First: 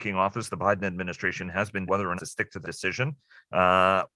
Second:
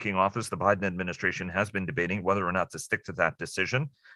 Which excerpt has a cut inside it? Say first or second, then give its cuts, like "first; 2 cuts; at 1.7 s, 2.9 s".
first; 3 cuts; at 1.9 s, 2.2 s, 2.6 s